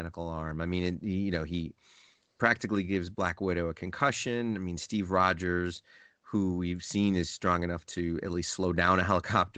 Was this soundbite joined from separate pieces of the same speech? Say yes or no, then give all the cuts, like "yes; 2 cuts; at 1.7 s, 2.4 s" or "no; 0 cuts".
no; 0 cuts